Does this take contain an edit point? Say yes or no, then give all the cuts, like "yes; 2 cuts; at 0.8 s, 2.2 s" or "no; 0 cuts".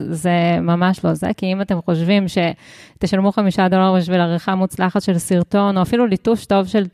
no; 0 cuts